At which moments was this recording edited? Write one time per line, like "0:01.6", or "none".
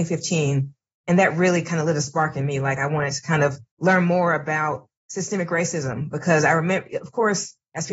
0:03.7
0:05.0